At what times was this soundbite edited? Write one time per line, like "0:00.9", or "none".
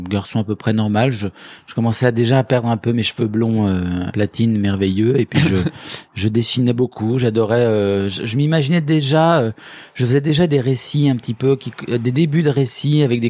0:04.1